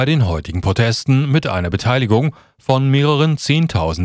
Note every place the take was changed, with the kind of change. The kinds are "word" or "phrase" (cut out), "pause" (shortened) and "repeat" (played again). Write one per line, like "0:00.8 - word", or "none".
none